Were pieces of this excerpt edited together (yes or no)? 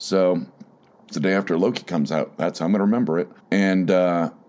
yes